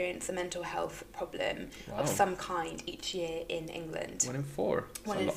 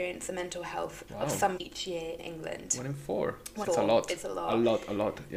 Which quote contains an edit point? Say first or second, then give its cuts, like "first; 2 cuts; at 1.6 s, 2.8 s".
second; 4 cuts; at 1.1 s, 1.6 s, 2.2 s, 3.6 s